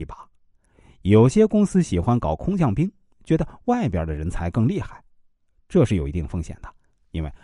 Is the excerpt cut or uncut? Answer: uncut